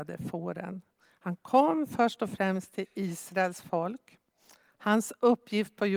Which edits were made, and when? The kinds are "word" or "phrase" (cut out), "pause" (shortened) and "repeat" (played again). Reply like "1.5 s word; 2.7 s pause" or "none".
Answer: none